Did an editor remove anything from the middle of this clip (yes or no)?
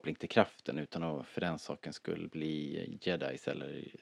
no